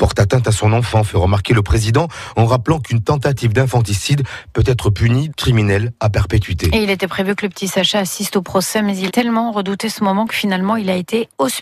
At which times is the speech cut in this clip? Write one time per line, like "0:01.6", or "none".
0:05.3
0:09.1

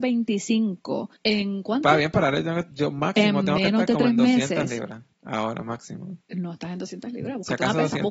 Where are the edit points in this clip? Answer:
0:01.2
0:05.1
0:06.2

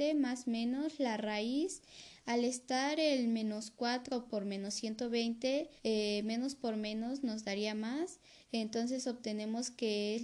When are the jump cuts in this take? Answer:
0:05.8

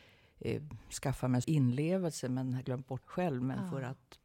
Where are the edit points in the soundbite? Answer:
0:01.4
0:02.6
0:03.0

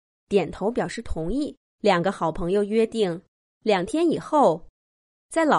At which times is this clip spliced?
0:01.7
0:03.4

